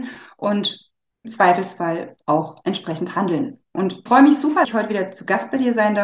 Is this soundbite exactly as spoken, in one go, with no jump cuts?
no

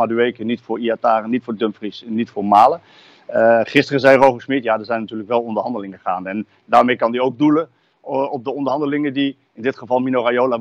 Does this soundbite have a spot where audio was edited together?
no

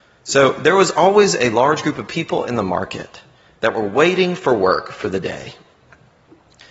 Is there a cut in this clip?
no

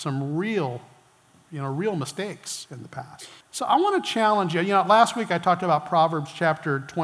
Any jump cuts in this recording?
yes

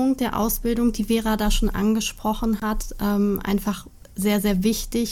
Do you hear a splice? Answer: no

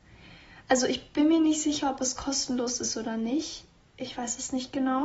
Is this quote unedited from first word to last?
yes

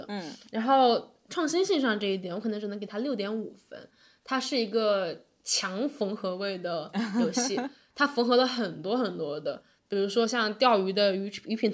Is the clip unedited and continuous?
yes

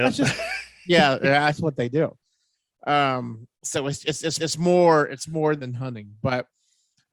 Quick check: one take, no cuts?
no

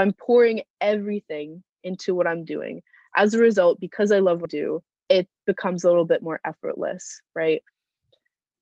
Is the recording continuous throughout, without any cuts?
no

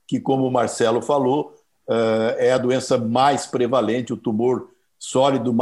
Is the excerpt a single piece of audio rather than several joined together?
yes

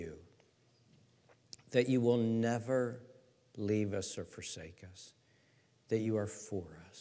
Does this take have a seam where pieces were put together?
no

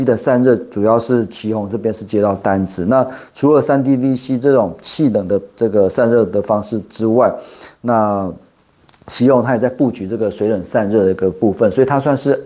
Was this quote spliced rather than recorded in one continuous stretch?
no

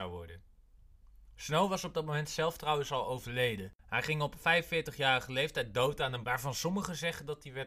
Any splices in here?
yes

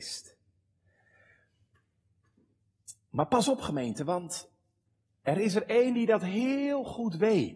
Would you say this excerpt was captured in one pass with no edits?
yes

